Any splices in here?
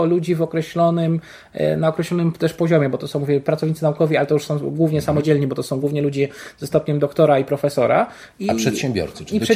no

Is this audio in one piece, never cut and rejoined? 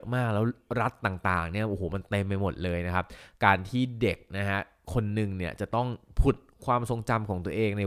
yes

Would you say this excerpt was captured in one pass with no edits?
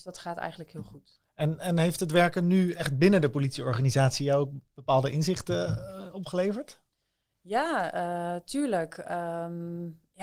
yes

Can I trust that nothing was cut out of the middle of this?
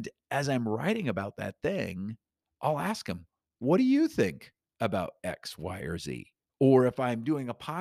yes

